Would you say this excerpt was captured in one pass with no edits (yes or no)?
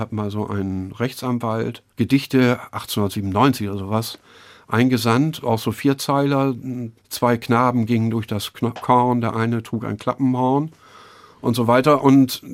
no